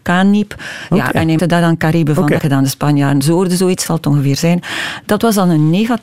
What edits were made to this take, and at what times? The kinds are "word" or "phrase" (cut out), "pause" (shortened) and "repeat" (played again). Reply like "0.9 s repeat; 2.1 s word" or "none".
1.4 s word; 2.4 s phrase; 3.9 s phrase